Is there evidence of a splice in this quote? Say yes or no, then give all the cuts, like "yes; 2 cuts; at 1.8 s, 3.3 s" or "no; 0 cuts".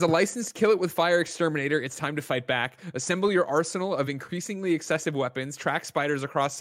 no; 0 cuts